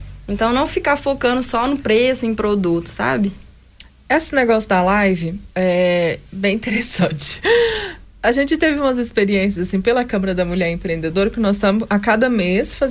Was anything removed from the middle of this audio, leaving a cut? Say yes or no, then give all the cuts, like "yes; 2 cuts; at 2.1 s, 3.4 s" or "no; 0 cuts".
no; 0 cuts